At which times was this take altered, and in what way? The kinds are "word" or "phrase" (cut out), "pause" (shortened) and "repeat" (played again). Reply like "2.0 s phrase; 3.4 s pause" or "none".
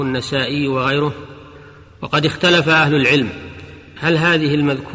none